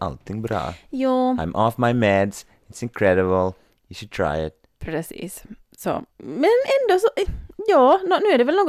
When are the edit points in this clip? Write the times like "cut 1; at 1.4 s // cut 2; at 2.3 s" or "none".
cut 1; at 4.7 s // cut 2; at 6.1 s